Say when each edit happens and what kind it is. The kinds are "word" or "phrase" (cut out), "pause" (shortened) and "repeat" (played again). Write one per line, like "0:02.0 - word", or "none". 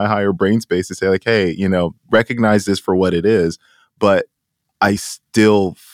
none